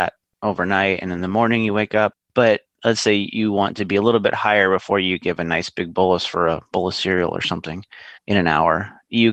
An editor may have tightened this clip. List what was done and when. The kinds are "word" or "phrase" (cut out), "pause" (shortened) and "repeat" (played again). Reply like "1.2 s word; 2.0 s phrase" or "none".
2.2 s pause; 6.7 s pause; 8.2 s pause